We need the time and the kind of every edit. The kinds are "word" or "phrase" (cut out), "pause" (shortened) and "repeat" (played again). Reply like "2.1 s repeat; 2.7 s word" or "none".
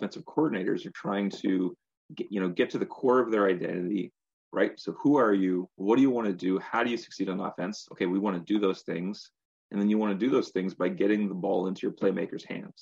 none